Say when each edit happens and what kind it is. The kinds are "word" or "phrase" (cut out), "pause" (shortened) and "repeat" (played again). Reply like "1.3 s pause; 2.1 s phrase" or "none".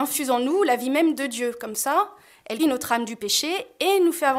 2.6 s word